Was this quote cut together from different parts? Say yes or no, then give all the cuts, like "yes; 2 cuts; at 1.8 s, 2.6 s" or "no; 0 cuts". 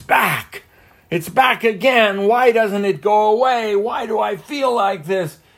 no; 0 cuts